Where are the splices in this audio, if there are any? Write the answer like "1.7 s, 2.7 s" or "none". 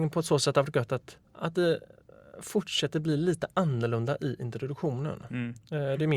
1.2 s